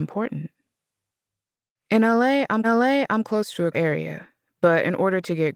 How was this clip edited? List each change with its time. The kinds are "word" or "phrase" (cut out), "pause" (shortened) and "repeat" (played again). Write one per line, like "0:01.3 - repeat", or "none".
0:02.6 - repeat
0:03.7 - word